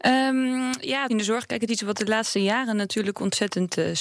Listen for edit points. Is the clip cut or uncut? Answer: cut